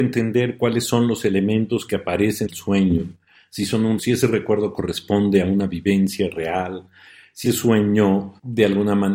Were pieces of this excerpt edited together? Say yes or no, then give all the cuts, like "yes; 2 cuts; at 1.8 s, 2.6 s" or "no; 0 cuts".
yes; 3 cuts; at 2.5 s, 4.0 s, 7.4 s